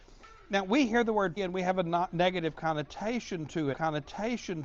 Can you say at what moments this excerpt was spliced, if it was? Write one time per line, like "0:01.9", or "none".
0:01.4
0:03.7